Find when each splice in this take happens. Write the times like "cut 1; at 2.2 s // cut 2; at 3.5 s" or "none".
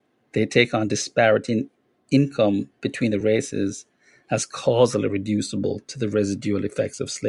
none